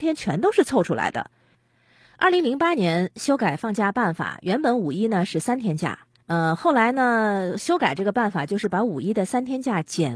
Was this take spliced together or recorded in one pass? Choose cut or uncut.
cut